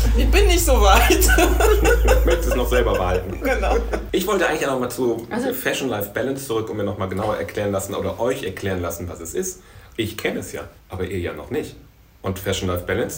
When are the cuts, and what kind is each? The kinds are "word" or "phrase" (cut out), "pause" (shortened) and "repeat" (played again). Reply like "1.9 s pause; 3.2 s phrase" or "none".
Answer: 10.8 s pause